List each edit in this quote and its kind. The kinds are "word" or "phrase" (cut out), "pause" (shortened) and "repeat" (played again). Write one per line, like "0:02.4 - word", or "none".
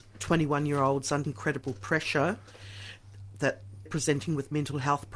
0:01.2 - word
0:03.9 - word